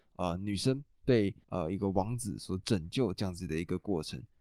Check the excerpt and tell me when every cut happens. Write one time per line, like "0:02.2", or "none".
0:01.4